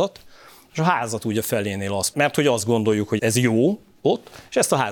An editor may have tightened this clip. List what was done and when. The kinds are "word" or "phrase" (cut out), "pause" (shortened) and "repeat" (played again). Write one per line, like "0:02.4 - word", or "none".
0:02.1 - word
0:03.2 - word